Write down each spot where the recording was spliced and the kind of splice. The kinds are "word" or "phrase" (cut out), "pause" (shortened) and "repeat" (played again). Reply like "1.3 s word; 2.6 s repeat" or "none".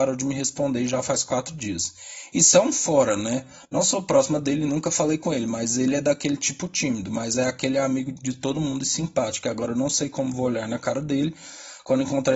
none

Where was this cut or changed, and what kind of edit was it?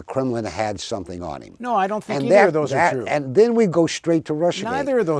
none

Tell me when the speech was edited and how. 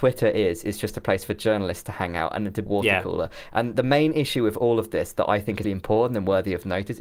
2.7 s word; 5.6 s word

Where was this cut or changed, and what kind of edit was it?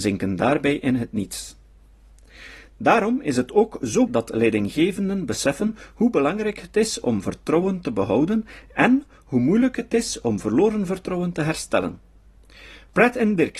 4.1 s word

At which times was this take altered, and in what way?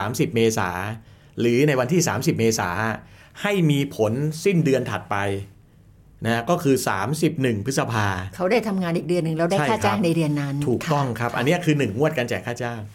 none

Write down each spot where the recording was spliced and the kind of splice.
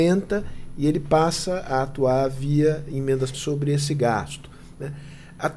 3.3 s word

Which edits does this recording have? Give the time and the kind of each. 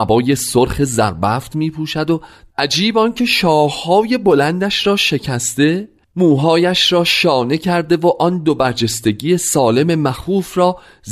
none

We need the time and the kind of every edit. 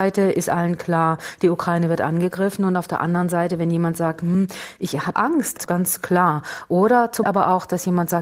5.1 s word; 5.6 s word; 7.2 s word

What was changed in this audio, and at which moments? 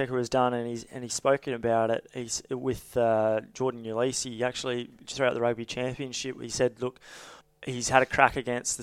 7.4 s pause

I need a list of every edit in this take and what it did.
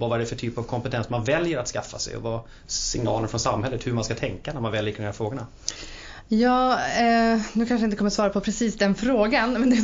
none

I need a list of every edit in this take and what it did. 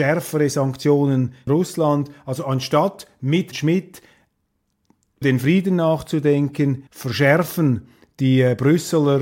1.5 s word; 3.5 s word; 5.2 s word; 6.9 s pause

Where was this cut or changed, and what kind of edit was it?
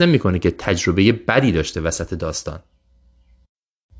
none

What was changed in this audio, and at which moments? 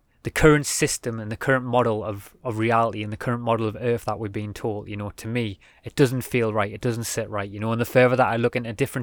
5.9 s word

